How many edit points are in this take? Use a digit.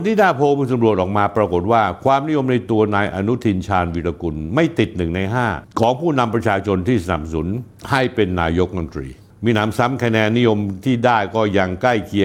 0